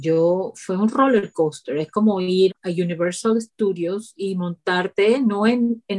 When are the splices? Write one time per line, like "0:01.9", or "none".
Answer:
0:02.5